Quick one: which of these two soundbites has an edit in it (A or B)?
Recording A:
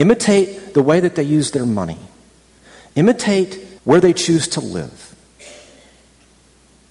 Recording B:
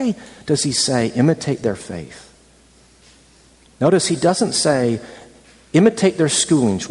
A